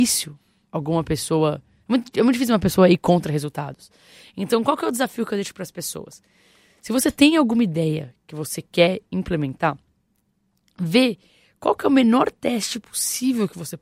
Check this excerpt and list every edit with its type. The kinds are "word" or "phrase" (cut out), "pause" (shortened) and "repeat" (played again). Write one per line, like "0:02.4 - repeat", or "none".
none

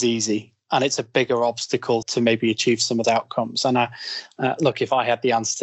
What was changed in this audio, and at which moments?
0:02.0 - word
0:03.0 - word

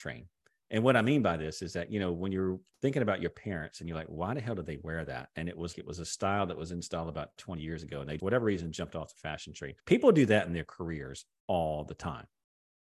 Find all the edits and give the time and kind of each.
0:05.7 - word
0:08.2 - word
0:09.8 - pause

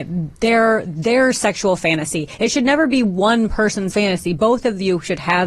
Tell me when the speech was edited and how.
0:03.9 - word

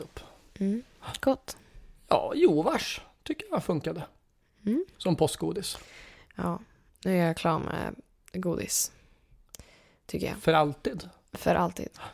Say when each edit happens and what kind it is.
none

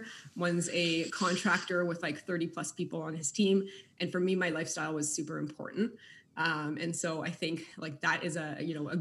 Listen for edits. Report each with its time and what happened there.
none

